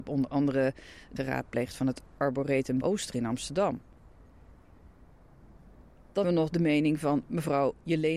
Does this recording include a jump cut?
yes; 3 cuts; at 1.2 s, 2.8 s, 6.2 s

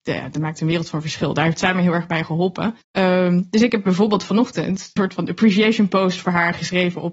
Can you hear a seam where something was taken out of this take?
yes; 2 cuts; at 2.8 s, 5.0 s

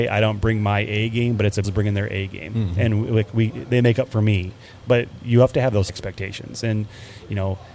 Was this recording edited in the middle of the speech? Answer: yes; 2 cuts; at 1.6 s, 5.9 s

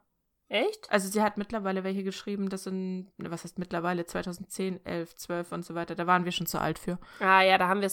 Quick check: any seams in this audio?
no; 0 cuts

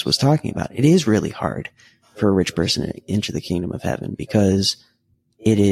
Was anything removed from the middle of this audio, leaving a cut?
no; 0 cuts

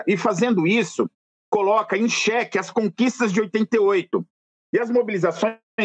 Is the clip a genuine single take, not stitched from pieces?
yes; 0 cuts

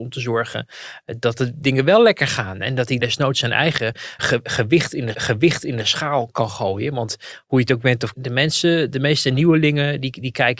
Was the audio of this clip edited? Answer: yes; 4 cuts; at 3.0 s, 4.2 s, 5.1 s, 8.1 s

